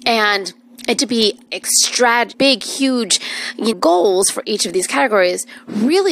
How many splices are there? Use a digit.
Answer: 4